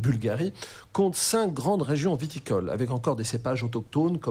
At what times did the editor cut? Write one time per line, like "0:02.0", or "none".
none